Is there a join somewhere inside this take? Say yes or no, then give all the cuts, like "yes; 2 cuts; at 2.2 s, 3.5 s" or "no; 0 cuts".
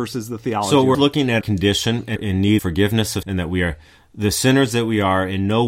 yes; 5 cuts; at 0.9 s, 1.4 s, 2.2 s, 2.6 s, 3.2 s